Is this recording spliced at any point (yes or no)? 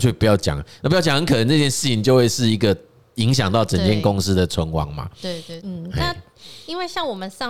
no